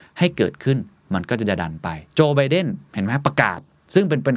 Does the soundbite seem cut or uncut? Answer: cut